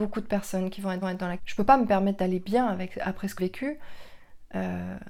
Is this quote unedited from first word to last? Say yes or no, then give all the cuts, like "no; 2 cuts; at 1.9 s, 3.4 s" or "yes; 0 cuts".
no; 3 cuts; at 1.0 s, 1.4 s, 3.4 s